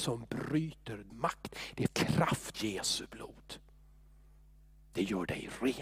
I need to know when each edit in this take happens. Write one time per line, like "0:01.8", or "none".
0:01.1
0:01.9
0:02.5